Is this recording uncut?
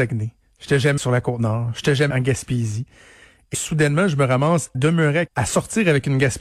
no; 5 cuts; at 1.0 s, 2.1 s, 3.5 s, 4.7 s, 5.3 s

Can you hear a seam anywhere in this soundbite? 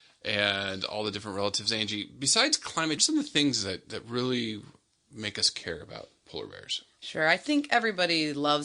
yes; 1 cut; at 3.0 s

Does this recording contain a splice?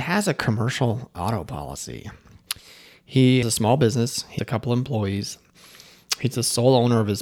yes; 2 cuts; at 3.4 s, 4.4 s

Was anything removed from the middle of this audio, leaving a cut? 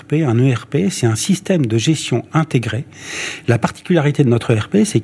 no; 0 cuts

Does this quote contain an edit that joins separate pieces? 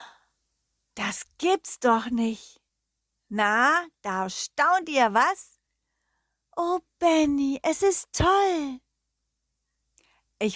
no; 0 cuts

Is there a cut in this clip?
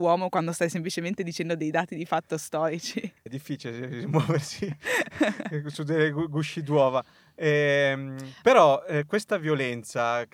yes; 1 cut; at 3.3 s

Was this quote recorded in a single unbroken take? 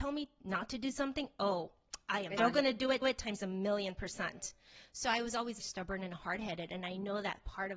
no; 3 cuts; at 2.4 s, 3.0 s, 5.6 s

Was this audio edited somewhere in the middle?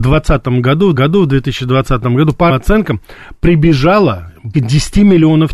yes; 3 cuts; at 1.0 s, 2.5 s, 4.5 s

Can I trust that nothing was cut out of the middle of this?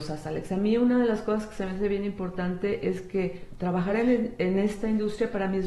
yes; 0 cuts

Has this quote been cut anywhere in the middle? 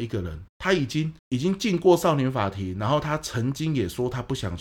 yes; 1 cut; at 1.2 s

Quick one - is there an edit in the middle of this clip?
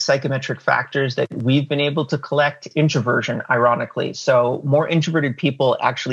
yes; 1 cut; at 2.7 s

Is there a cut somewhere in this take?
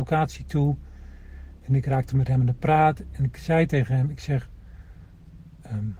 no; 0 cuts

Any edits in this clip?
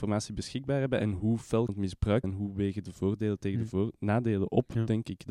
yes; 2 cuts; at 1.7 s, 2.2 s

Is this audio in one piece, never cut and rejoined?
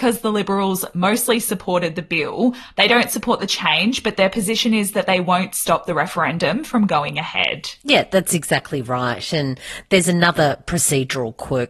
yes; 0 cuts

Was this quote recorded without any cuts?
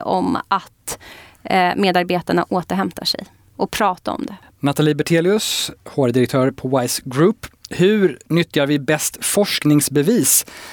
yes; 0 cuts

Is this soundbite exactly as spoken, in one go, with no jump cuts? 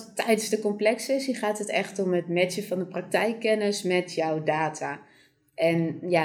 yes; 0 cuts

